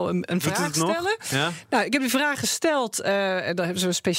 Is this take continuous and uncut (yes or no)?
yes